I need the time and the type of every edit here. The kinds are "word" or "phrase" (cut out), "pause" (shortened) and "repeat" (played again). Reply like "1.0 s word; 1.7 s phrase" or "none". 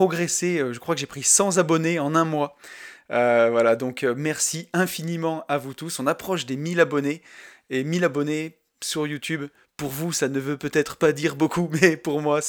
none